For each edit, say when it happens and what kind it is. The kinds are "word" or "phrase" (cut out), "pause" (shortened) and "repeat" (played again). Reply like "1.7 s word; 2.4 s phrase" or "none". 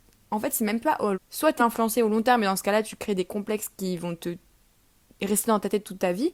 1.1 s phrase; 1.6 s word